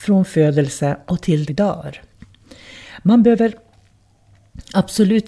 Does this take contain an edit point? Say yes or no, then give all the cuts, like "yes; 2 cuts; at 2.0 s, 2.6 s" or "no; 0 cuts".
yes; 1 cut; at 1.5 s